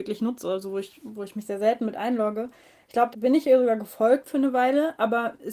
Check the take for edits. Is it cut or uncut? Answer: cut